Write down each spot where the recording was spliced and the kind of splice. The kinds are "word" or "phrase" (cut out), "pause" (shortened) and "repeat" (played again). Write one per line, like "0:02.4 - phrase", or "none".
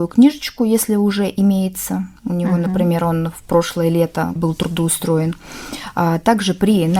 0:02.2 - pause
0:04.4 - word